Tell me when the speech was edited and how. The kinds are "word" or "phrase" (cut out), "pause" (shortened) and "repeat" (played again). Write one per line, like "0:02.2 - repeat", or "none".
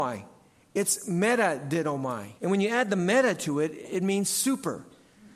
0:02.4 - pause